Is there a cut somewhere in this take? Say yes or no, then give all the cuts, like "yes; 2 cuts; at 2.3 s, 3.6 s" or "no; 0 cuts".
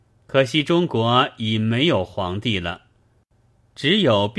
no; 0 cuts